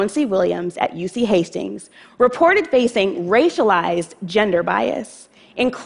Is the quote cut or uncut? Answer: uncut